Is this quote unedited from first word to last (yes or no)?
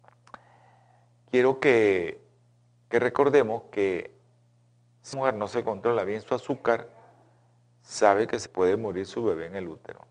no